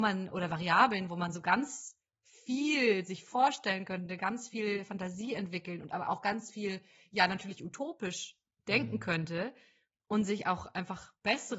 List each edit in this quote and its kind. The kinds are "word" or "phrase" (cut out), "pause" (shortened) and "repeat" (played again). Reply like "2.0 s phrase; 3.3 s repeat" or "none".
none